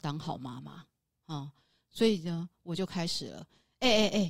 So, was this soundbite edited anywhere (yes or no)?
no